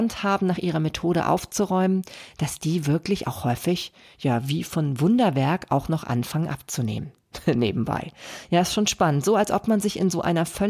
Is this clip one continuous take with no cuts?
yes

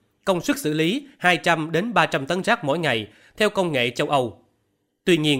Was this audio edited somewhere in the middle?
no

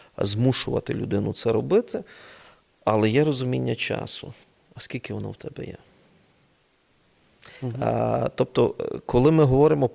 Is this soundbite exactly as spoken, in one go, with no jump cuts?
no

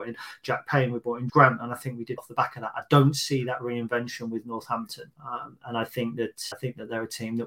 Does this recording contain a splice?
yes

